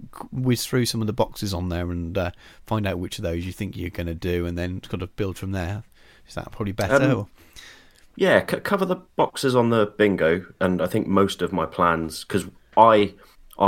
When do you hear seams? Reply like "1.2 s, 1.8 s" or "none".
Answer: none